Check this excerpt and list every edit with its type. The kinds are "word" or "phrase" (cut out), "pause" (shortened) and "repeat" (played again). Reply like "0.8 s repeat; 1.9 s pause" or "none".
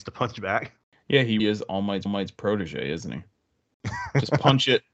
1.4 s word; 2.1 s repeat